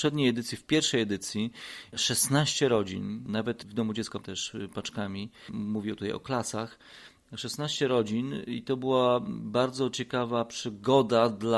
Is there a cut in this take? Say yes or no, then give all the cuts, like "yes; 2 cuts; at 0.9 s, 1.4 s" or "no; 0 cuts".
yes; 2 cuts; at 1.9 s, 4.2 s